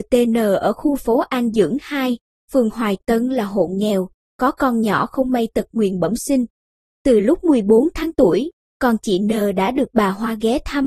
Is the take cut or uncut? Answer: uncut